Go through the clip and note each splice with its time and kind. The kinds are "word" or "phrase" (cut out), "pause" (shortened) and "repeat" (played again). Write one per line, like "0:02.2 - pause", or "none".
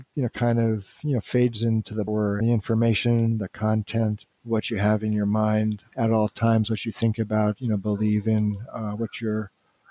0:02.1 - phrase
0:02.4 - word
0:04.3 - pause
0:05.9 - word